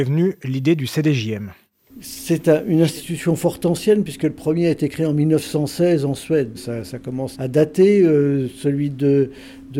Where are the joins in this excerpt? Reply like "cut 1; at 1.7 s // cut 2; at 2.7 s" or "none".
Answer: cut 1; at 6.5 s // cut 2; at 7.3 s